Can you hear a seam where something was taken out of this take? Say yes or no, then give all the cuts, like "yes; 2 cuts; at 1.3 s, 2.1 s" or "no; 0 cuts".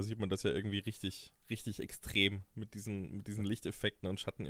no; 0 cuts